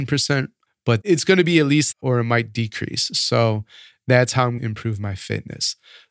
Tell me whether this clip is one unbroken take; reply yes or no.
no